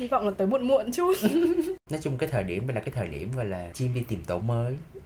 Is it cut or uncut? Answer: cut